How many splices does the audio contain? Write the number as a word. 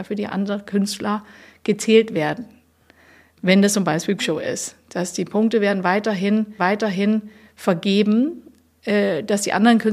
two